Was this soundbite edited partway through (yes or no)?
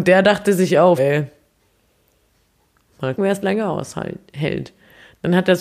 yes